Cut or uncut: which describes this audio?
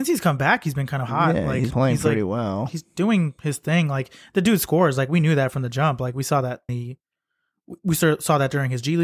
cut